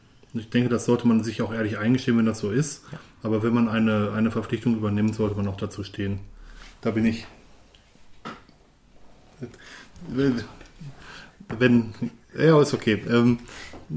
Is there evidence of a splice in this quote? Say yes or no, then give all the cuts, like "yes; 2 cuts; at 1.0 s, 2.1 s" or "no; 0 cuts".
no; 0 cuts